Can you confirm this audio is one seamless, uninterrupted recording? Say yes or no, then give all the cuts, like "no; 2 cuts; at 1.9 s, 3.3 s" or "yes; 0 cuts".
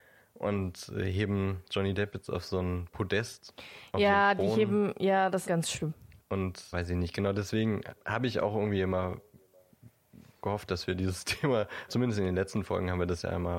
no; 4 cuts; at 5.4 s, 6.7 s, 8.0 s, 11.9 s